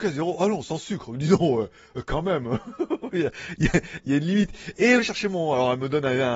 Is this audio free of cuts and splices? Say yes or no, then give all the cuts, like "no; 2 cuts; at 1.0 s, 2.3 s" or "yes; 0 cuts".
no; 1 cut; at 5.0 s